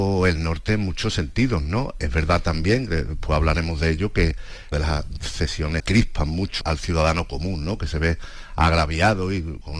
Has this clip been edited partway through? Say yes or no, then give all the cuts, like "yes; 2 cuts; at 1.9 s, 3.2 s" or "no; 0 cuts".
yes; 3 cuts; at 4.7 s, 5.8 s, 6.6 s